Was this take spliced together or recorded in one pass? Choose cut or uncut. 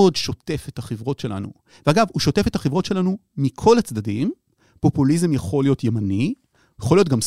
uncut